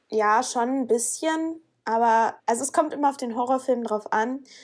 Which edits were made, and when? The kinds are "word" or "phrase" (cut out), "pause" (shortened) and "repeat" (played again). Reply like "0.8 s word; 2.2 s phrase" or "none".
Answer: 2.4 s pause